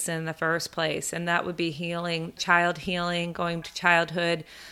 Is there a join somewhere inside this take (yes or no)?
yes